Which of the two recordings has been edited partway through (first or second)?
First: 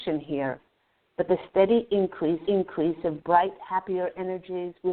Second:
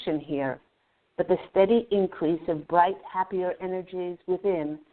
first